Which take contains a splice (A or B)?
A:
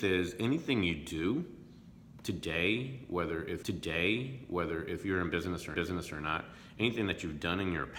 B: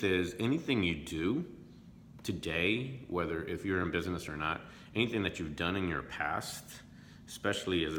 A